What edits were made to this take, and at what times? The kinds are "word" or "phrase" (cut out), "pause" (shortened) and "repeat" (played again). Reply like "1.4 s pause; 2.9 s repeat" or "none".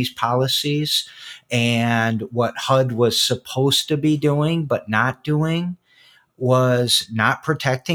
none